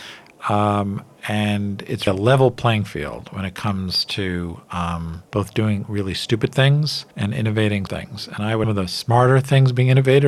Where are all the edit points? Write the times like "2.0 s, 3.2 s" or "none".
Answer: 2.1 s, 5.3 s, 7.1 s, 7.9 s, 8.6 s